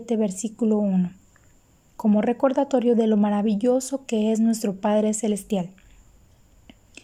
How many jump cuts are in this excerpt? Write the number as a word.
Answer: zero